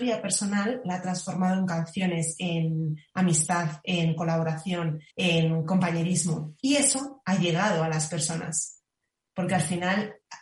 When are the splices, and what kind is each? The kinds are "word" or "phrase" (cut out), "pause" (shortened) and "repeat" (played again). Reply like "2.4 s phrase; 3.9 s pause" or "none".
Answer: 5.1 s pause; 6.6 s pause